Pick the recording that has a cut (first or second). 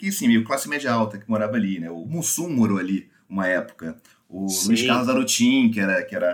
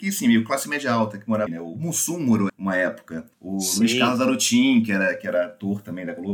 second